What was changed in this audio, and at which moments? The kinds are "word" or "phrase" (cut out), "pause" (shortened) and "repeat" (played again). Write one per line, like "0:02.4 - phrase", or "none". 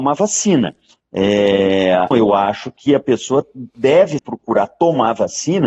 0:02.1 - word
0:04.2 - word